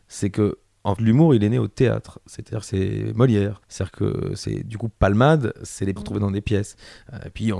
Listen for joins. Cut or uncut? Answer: cut